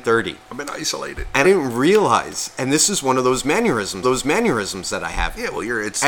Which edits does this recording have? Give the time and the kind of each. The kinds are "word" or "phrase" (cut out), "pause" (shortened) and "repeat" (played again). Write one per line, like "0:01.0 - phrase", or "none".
0:01.4 - word
0:04.0 - repeat